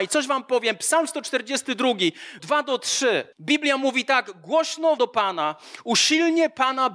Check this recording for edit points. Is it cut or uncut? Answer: cut